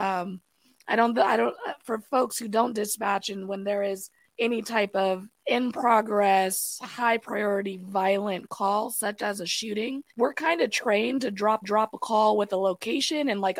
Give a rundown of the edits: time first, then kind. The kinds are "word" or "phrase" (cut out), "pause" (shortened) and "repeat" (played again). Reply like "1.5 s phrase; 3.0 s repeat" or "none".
4.2 s pause; 5.4 s pause; 10.1 s pause; 11.6 s repeat